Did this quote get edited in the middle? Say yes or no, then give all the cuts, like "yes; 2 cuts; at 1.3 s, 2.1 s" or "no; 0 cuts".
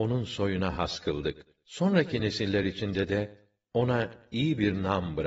no; 0 cuts